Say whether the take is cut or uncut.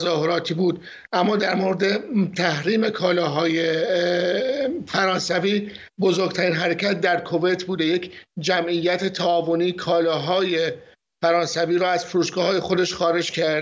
uncut